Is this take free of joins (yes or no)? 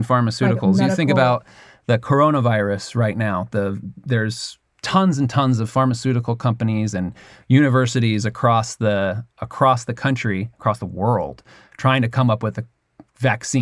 yes